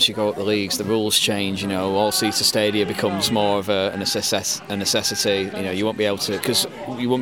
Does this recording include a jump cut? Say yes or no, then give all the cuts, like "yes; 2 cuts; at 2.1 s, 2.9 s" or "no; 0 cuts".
no; 0 cuts